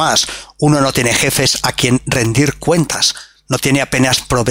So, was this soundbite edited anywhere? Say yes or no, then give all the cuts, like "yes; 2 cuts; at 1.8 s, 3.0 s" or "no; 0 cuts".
no; 0 cuts